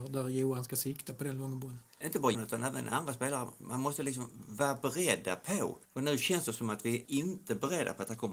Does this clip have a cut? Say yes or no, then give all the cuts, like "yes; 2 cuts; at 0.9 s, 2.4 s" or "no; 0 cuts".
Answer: yes; 4 cuts; at 2.0 s, 2.3 s, 5.8 s, 7.0 s